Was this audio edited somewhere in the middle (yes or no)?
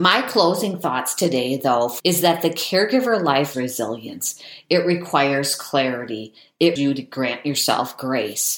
yes